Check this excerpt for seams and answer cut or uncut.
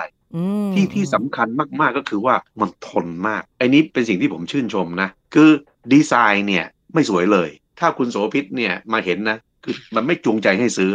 uncut